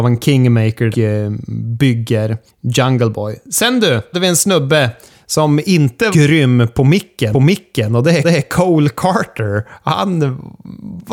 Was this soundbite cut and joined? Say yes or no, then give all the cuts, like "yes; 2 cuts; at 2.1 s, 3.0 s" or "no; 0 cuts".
yes; 6 cuts; at 0.9 s, 2.5 s, 4.1 s, 6.1 s, 7.3 s, 8.2 s